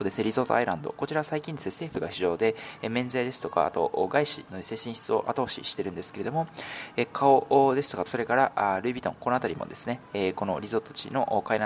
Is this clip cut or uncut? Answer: cut